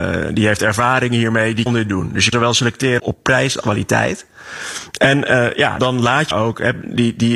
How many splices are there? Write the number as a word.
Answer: six